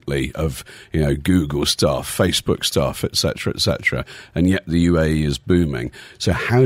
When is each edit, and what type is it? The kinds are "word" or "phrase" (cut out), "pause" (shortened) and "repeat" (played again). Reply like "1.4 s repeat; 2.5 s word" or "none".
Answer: none